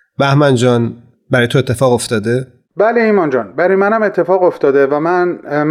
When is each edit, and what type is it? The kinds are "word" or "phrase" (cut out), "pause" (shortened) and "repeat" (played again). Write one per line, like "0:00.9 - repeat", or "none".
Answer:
none